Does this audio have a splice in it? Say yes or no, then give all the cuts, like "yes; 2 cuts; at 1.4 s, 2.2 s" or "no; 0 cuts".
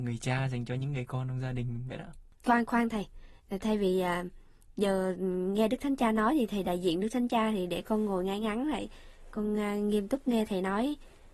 no; 0 cuts